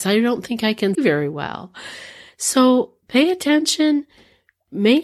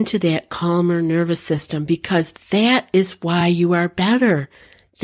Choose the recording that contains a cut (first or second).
first